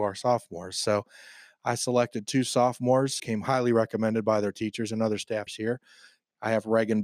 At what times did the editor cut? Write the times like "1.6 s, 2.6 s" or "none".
3.2 s, 5.5 s